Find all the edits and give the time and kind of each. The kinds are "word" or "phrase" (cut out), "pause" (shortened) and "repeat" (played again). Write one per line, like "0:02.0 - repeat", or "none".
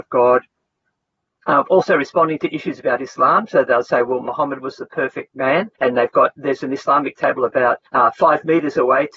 0:05.7 - pause
0:07.9 - pause